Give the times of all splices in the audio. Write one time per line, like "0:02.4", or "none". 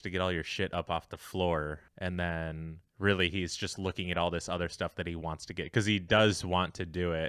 0:01.9
0:02.9